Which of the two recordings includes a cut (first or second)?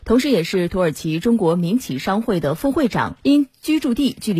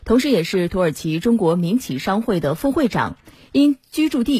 first